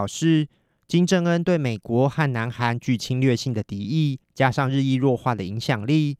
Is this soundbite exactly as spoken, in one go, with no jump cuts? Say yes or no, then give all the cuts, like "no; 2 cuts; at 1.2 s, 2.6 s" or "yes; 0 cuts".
no; 1 cut; at 4.2 s